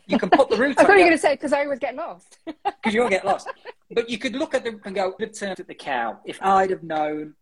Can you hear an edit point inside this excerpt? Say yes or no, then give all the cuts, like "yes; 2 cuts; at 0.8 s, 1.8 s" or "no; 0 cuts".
yes; 4 cuts; at 4.8 s, 5.2 s, 5.5 s, 6.4 s